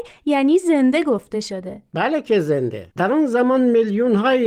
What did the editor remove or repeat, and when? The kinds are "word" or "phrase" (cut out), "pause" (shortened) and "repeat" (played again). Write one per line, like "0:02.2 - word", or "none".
0:02.9 - pause